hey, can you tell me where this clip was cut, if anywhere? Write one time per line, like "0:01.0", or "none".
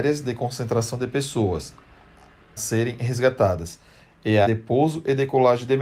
0:02.6
0:04.4